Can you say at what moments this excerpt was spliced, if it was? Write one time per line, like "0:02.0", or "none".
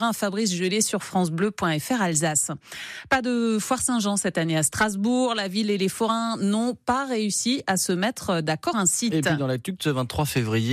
0:08.7